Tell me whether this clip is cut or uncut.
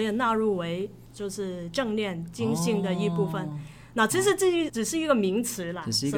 cut